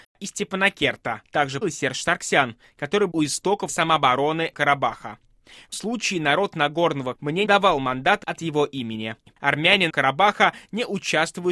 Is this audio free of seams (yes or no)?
no